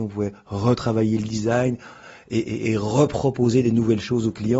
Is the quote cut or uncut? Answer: uncut